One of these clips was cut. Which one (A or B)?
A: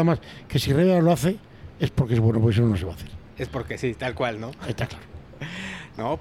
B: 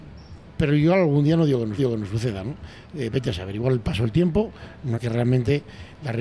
B